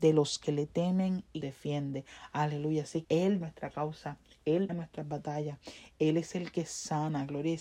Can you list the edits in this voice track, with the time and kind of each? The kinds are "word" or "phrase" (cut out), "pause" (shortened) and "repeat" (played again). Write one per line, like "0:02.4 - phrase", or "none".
0:01.4 - word
0:03.0 - word
0:03.4 - word
0:04.7 - word